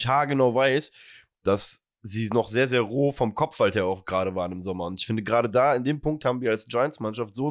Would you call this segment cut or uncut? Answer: uncut